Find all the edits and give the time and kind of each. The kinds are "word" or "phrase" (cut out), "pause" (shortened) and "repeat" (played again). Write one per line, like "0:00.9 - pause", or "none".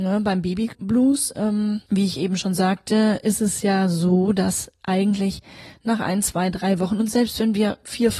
none